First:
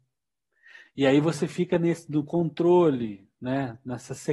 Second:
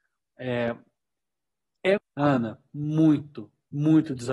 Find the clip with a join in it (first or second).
second